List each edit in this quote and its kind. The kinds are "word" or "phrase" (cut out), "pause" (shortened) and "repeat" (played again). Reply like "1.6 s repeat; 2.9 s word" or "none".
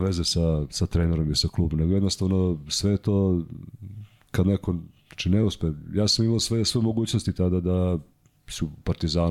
none